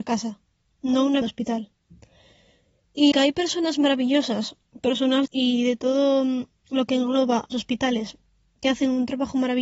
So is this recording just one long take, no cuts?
no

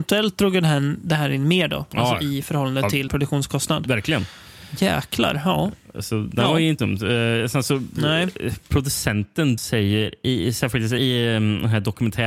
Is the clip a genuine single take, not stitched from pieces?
no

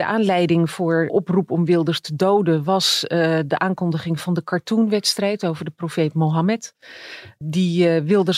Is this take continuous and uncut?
no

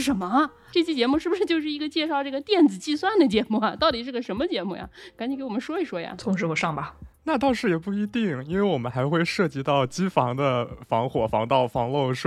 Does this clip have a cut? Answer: no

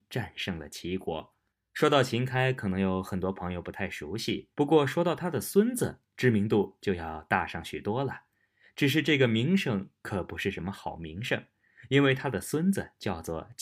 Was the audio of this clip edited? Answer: yes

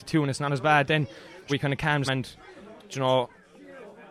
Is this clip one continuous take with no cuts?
no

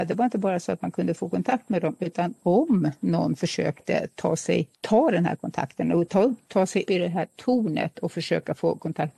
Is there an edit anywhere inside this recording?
yes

